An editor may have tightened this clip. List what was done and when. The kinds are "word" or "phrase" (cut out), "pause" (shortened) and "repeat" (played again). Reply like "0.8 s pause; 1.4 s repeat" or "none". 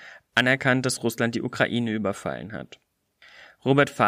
none